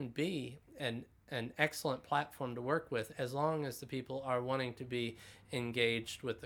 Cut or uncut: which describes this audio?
uncut